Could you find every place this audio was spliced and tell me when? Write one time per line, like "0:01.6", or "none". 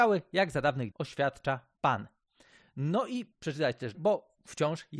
0:00.9
0:03.3
0:03.9